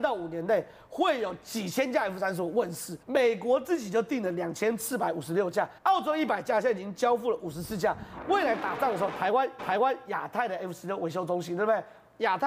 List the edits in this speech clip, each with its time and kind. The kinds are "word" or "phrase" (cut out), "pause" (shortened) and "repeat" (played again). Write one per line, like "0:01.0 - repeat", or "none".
0:03.0 - pause
0:05.8 - pause
0:09.6 - repeat